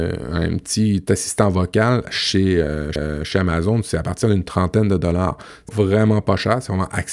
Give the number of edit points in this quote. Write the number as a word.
two